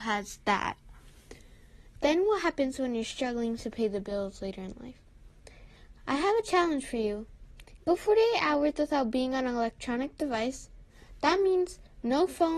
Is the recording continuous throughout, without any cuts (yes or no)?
yes